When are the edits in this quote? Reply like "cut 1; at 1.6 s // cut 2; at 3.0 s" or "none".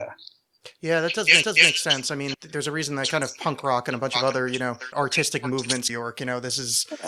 cut 1; at 1.4 s // cut 2; at 2.3 s // cut 3; at 4.9 s // cut 4; at 5.9 s